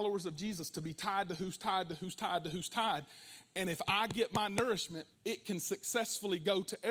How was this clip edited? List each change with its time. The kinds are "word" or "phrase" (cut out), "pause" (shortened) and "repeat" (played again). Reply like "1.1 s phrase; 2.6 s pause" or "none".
5.1 s pause